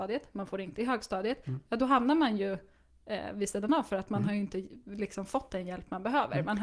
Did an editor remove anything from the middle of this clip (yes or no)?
no